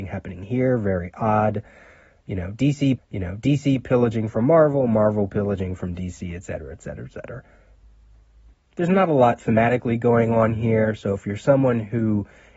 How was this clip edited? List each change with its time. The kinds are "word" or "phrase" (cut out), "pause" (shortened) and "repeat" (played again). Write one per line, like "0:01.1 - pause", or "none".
0:03.0 - repeat